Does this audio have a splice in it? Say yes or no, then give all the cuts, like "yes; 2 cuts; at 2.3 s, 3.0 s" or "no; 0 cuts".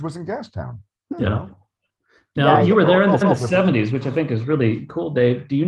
yes; 1 cut; at 3.2 s